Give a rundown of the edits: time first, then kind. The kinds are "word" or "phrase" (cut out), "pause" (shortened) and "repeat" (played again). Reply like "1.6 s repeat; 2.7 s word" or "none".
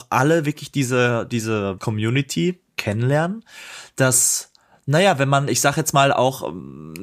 1.8 s word